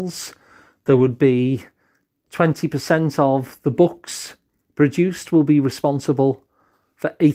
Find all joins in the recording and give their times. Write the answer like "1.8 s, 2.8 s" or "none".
none